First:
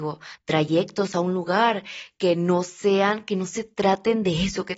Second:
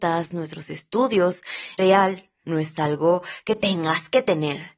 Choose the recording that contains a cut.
second; 2 cuts; at 1.8 s, 2.4 s

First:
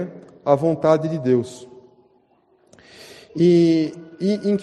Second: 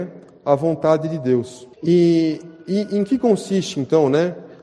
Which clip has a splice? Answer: second; 1 cut; at 1.7 s

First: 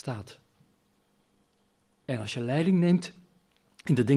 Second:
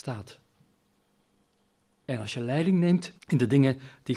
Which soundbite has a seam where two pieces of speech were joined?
second; 1 cut; at 3.2 s

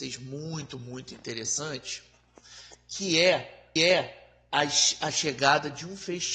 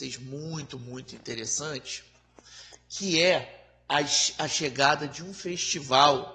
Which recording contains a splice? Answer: first; 1 cut; at 3.8 s

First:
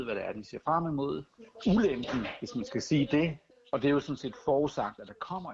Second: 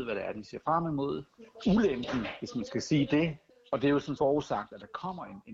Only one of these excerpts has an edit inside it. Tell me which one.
second; 1 cut; at 4.2 s

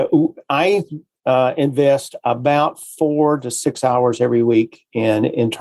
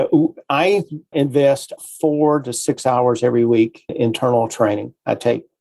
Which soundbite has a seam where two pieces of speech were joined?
second; 3 cuts; at 1.1 s, 1.8 s, 3.9 s

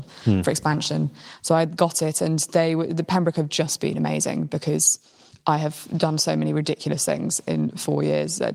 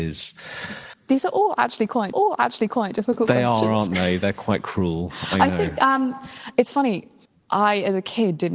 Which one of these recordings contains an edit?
second; 2 cuts; at 2.1 s, 7.2 s

